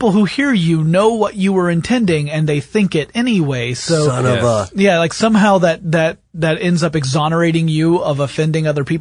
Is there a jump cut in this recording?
no; 0 cuts

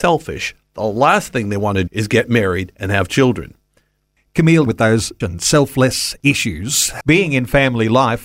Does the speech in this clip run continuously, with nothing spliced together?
no; 4 cuts; at 1.9 s, 4.7 s, 5.2 s, 7.0 s

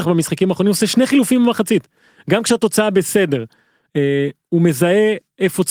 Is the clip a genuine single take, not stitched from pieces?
yes; 0 cuts

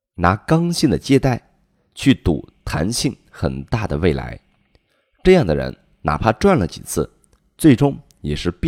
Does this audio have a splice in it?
no; 0 cuts

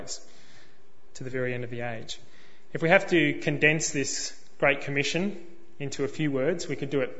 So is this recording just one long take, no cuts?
yes; 0 cuts

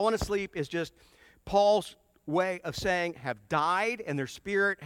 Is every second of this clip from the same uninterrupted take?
yes; 0 cuts

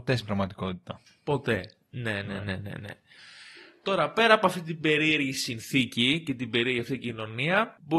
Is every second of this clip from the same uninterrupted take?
yes; 0 cuts

